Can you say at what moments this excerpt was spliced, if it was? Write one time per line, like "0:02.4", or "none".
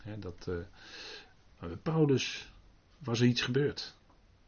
none